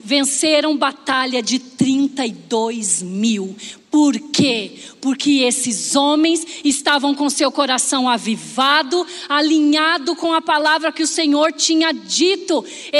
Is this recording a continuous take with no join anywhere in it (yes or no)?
yes